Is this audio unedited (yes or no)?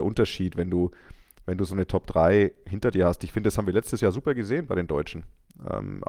yes